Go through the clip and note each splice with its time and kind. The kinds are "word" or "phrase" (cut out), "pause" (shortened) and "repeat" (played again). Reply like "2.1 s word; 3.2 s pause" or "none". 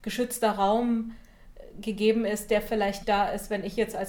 3.0 s word